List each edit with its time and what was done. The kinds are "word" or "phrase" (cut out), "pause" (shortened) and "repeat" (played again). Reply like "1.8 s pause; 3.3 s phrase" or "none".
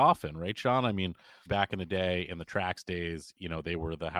1.5 s word